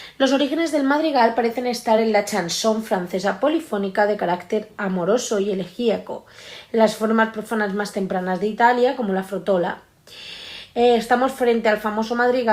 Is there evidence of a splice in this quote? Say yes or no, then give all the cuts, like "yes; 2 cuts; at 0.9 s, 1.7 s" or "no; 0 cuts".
no; 0 cuts